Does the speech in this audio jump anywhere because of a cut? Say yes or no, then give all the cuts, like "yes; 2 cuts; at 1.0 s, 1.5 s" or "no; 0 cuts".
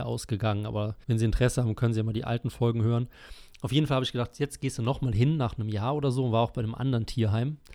yes; 1 cut; at 1.0 s